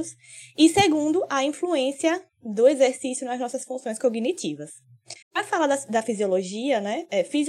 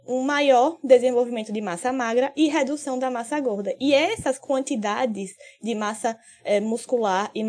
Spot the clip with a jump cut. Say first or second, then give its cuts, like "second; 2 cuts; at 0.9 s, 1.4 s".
first; 1 cut; at 5.2 s